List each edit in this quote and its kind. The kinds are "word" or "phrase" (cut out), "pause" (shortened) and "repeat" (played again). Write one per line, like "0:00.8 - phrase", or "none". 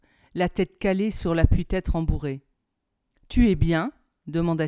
0:02.5 - pause